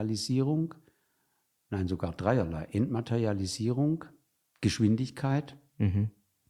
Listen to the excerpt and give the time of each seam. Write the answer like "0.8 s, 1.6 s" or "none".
none

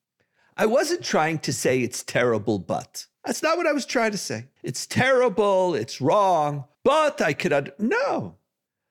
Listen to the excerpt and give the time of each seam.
3.1 s, 4.6 s, 6.7 s

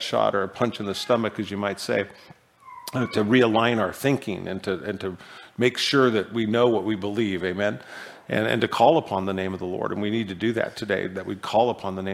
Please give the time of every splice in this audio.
none

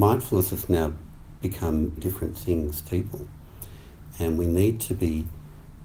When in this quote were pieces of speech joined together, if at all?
2.0 s, 2.9 s, 4.1 s

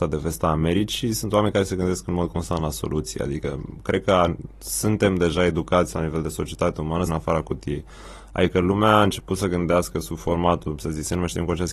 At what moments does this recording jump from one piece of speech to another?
7.1 s

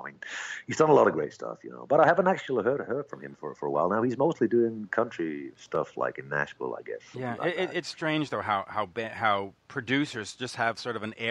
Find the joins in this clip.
none

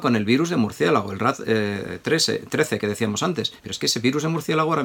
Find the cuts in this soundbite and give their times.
3.6 s

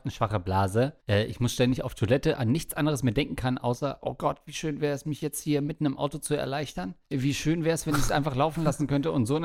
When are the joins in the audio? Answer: 1.0 s, 7.0 s

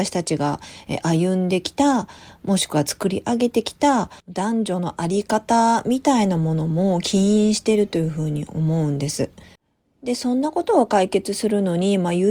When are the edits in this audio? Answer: 4.2 s

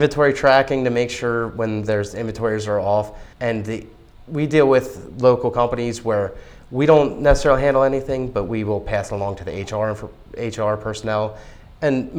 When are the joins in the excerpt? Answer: 3.3 s

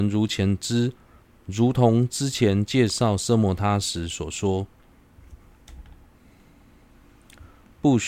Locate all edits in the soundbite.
1.2 s

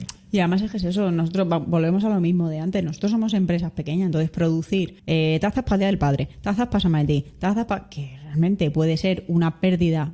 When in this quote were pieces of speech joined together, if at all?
5.0 s

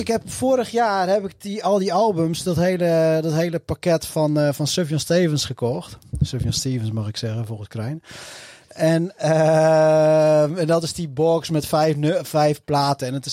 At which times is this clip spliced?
none

